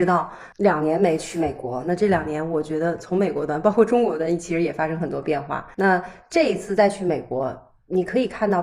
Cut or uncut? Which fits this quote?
cut